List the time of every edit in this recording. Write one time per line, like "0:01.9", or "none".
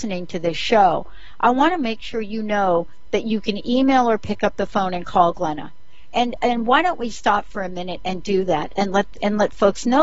none